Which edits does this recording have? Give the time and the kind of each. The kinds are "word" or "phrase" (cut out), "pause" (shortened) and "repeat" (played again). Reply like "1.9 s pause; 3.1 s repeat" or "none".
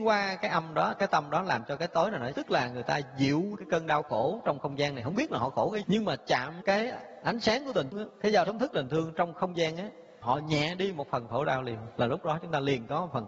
1.1 s word; 2.3 s word; 3.6 s word; 5.8 s word; 6.6 s word; 7.9 s word; 8.4 s word; 10.2 s word